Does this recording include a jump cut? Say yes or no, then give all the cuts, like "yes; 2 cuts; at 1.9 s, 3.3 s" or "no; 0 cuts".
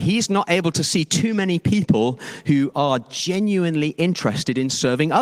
no; 0 cuts